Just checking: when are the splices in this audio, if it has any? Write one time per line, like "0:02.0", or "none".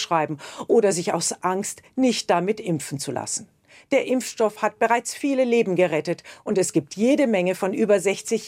none